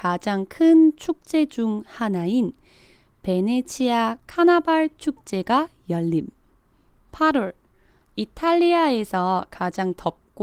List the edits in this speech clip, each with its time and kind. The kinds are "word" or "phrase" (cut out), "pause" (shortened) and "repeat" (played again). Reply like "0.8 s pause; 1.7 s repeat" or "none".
none